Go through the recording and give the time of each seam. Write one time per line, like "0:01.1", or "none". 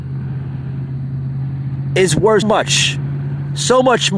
0:02.4